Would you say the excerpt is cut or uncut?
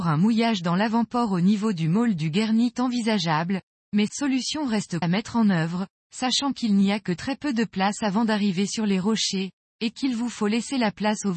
cut